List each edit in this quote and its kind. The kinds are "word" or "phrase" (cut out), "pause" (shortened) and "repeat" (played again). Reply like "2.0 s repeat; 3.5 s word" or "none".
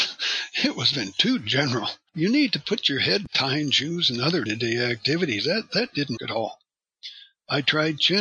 0.9 s word; 3.3 s word; 4.5 s word; 6.2 s word